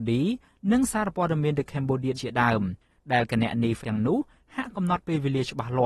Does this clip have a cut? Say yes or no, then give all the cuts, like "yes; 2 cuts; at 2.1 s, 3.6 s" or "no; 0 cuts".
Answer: yes; 2 cuts; at 2.1 s, 3.8 s